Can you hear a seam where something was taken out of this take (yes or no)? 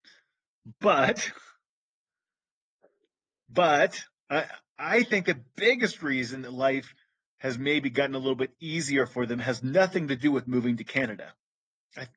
no